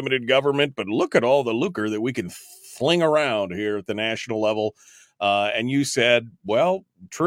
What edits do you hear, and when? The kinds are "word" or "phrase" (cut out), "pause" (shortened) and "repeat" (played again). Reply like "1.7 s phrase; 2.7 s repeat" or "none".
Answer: none